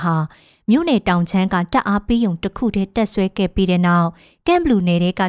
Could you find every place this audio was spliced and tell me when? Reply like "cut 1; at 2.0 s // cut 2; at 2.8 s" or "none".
none